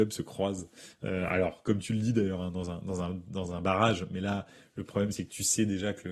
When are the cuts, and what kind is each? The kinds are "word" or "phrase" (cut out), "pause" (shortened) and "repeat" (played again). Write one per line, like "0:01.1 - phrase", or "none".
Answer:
none